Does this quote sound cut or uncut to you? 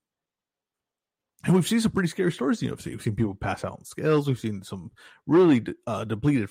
uncut